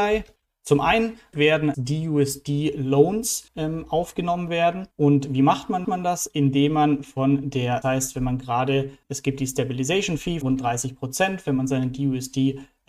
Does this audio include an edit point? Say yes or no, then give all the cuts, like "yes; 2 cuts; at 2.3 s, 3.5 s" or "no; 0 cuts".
yes; 8 cuts; at 1.3 s, 1.7 s, 3.5 s, 4.9 s, 5.8 s, 7.8 s, 9.0 s, 10.4 s